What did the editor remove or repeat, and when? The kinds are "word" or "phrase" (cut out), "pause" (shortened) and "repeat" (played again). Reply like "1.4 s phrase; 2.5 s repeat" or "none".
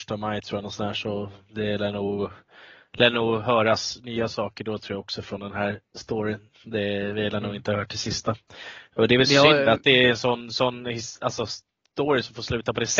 none